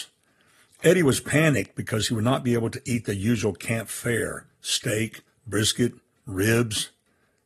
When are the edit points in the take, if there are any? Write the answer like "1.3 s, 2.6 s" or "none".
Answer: 5.3 s